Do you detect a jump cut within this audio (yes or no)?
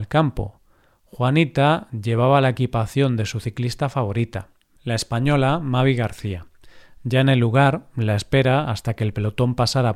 no